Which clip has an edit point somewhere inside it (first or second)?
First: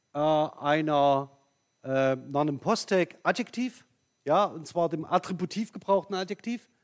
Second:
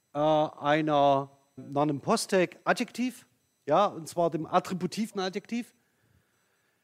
second